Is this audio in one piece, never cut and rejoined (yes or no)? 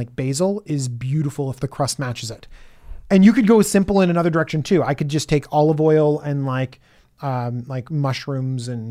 yes